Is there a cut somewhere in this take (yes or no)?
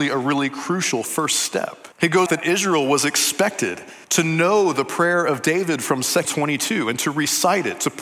yes